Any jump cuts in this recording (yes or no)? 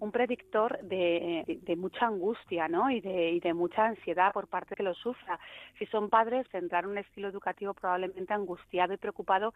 yes